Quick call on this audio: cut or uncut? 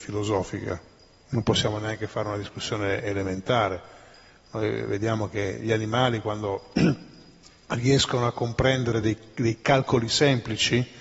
uncut